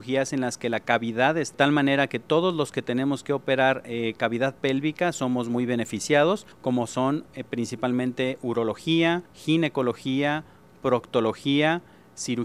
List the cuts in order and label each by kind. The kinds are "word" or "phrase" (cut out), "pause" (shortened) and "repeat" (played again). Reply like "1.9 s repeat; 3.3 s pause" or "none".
1.5 s phrase; 6.5 s pause; 9.3 s pause